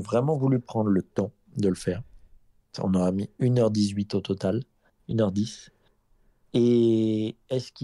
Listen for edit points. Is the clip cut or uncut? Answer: uncut